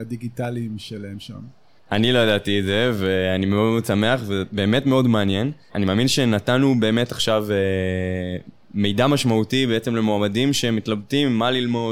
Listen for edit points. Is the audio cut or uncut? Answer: uncut